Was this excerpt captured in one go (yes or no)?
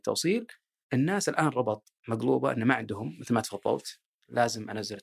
no